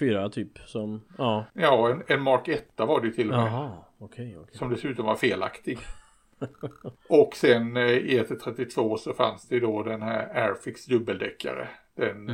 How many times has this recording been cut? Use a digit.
2